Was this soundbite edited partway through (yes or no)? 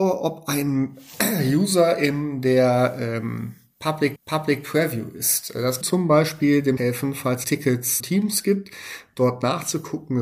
yes